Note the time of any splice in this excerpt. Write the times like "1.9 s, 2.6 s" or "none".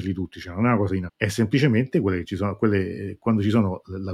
1.1 s